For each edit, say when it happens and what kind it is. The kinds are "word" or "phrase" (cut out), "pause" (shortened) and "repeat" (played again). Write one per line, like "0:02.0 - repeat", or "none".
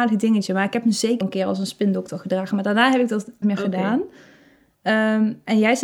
0:01.2 - word
0:03.4 - word